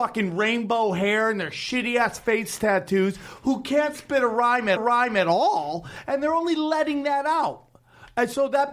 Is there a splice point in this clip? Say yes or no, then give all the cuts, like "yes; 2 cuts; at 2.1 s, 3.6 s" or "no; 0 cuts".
yes; 1 cut; at 4.8 s